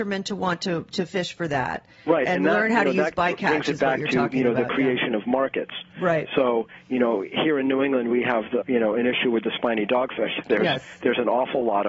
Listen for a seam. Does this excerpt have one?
yes; 1 cut; at 8.6 s

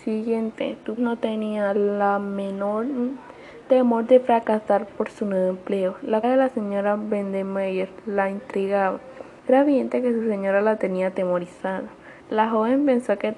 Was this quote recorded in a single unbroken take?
no; 4 cuts; at 1.0 s, 6.2 s, 9.4 s, 12.2 s

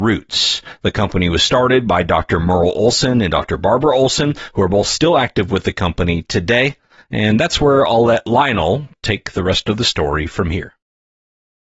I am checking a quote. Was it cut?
no; 0 cuts

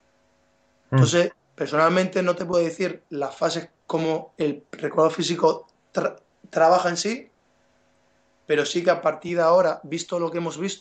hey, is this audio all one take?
yes; 0 cuts

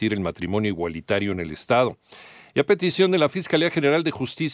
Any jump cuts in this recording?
no; 0 cuts

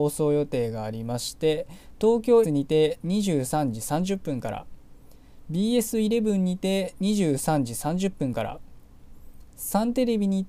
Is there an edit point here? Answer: yes; 1 cut; at 2.4 s

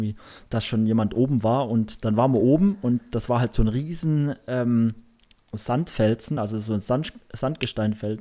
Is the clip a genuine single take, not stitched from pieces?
yes; 0 cuts

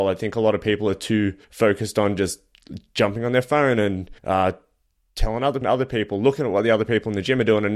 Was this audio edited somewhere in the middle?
yes; 3 cuts; at 1.4 s, 4.2 s, 5.6 s

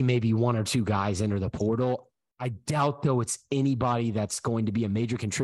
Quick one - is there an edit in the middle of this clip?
no; 0 cuts

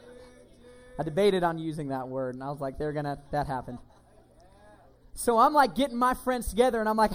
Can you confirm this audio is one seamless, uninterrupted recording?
yes; 0 cuts

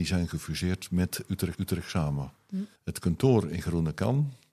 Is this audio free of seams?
no; 2 cuts; at 1.5 s, 2.8 s

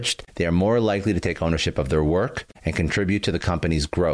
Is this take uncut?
yes; 0 cuts

